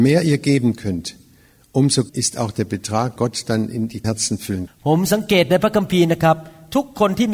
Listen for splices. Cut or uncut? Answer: cut